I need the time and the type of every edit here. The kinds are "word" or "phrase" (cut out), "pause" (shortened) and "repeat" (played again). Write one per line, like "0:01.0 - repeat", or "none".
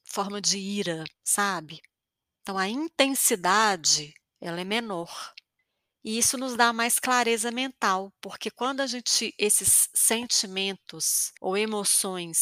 0:01.1 - pause
0:04.2 - pause
0:05.6 - pause
0:11.4 - pause